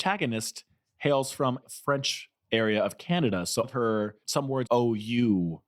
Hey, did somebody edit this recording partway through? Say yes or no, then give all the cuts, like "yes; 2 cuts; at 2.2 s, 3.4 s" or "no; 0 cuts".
yes; 4 cuts; at 1.6 s, 3.6 s, 4.2 s, 4.7 s